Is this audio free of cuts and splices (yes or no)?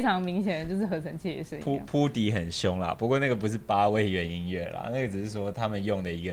yes